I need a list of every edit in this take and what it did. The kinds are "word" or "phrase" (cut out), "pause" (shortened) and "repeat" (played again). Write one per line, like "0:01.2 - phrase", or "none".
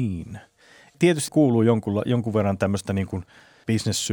0:01.3 - phrase